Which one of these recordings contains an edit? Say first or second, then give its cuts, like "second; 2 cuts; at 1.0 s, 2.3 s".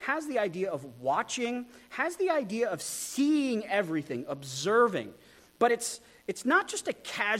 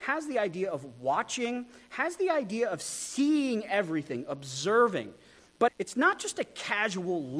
second; 1 cut; at 5.7 s